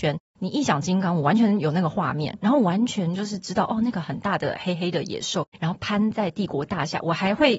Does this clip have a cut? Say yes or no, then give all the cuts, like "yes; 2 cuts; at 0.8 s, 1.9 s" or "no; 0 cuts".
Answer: yes; 1 cut; at 5.5 s